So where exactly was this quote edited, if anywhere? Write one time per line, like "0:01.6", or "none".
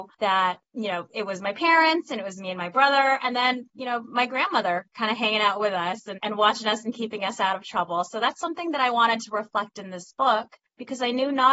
0:06.2